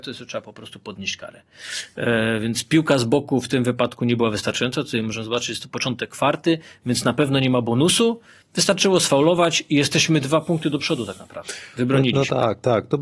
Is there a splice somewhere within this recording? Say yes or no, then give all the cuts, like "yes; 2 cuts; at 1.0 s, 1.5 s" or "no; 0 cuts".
no; 0 cuts